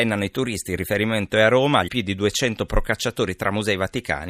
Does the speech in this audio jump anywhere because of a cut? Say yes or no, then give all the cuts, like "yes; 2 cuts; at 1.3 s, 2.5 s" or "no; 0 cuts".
yes; 1 cut; at 1.9 s